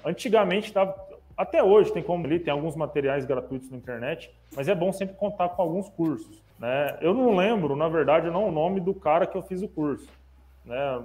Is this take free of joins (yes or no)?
no